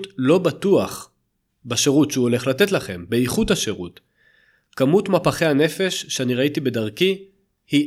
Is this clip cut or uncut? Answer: uncut